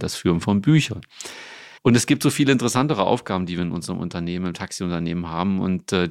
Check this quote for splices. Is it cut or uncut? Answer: cut